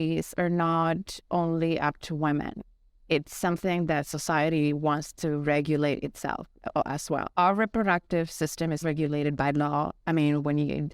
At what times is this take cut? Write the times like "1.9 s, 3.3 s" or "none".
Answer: 7.3 s, 8.8 s